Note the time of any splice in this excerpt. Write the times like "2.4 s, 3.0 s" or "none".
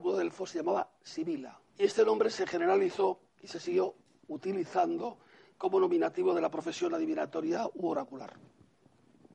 1.7 s